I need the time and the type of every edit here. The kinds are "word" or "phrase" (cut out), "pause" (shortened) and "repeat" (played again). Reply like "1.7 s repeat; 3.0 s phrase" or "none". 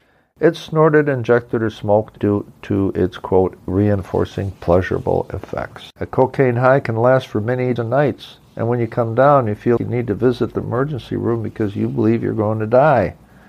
2.2 s phrase; 3.7 s word; 5.9 s pause; 7.8 s word; 9.8 s word